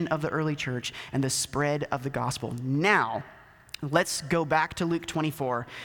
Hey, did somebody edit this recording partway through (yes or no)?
no